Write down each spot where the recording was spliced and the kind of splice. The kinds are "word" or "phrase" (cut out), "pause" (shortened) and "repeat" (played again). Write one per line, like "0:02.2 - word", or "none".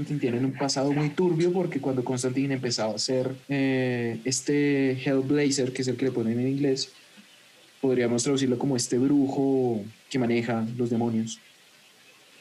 0:03.4 - pause
0:10.0 - pause

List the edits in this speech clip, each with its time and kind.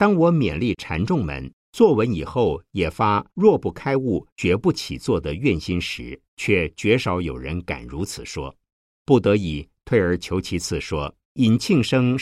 0:01.6 - pause
0:03.3 - pause
0:04.3 - pause
0:06.3 - pause
0:08.8 - pause
0:11.2 - pause

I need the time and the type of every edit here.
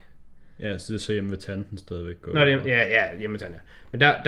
none

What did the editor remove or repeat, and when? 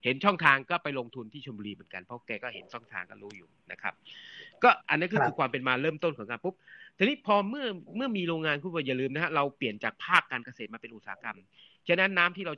0:04.8 - pause

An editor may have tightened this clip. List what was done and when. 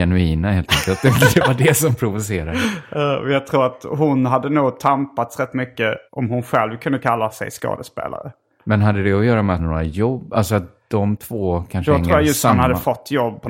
0:06.1 - pause
0:09.6 - phrase

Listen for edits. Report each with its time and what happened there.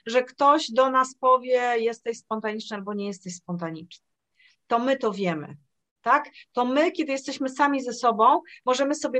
none

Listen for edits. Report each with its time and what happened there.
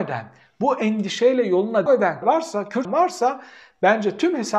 0:01.9 - word
0:02.2 - word
0:02.8 - word

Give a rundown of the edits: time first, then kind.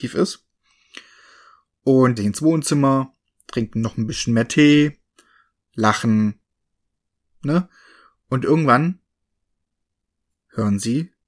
0:02.2 - phrase

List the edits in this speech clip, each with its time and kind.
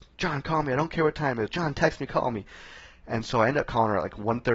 none

